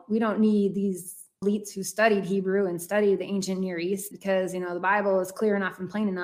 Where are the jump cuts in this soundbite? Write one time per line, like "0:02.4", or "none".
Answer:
0:01.4
0:04.1